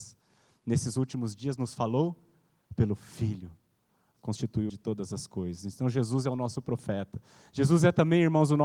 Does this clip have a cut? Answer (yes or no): yes